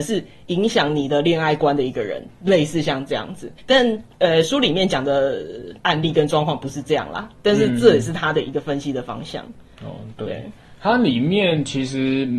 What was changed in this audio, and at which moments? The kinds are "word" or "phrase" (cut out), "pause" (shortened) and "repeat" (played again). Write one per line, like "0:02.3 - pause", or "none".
0:03.6 - pause
0:05.8 - pause